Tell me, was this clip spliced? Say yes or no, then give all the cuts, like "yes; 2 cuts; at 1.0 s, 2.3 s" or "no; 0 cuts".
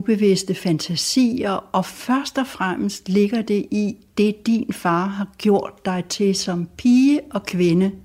no; 0 cuts